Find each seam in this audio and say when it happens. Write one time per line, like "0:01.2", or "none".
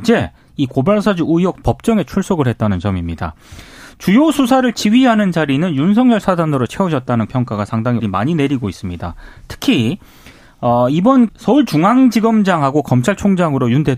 0:01.6
0:07.3
0:08.0
0:11.3